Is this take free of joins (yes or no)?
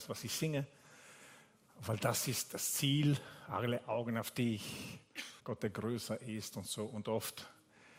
no